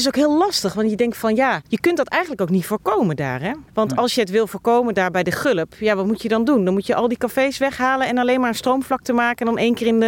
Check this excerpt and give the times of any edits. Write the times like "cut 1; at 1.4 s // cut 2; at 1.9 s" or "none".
cut 1; at 1.7 s // cut 2; at 3.7 s